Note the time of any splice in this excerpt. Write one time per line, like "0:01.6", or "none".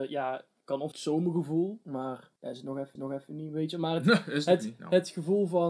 0:00.9
0:02.4
0:03.0